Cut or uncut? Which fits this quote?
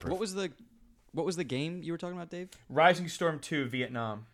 uncut